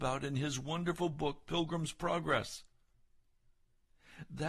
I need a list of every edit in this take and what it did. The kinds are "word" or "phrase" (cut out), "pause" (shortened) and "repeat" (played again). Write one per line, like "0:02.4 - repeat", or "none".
none